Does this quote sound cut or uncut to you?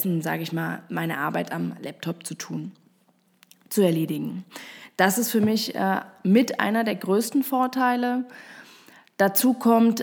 uncut